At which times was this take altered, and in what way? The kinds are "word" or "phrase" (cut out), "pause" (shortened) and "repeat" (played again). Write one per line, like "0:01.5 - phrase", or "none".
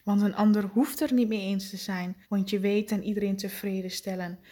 0:02.2 - pause
0:02.9 - phrase